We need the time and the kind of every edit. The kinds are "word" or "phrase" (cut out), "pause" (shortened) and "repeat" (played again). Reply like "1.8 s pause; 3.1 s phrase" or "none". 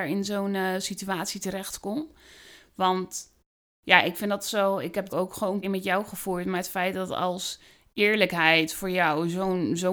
5.1 s phrase; 5.6 s word